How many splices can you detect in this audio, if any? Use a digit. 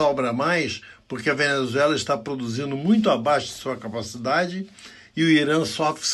0